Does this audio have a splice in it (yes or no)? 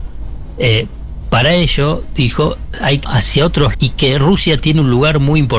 yes